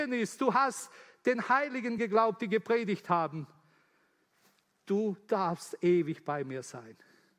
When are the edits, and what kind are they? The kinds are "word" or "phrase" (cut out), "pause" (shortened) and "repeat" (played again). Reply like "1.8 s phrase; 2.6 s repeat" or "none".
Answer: none